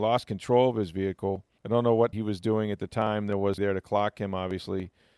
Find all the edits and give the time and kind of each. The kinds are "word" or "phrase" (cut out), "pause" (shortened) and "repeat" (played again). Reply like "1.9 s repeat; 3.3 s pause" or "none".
1.6 s pause; 2.1 s word; 3.6 s word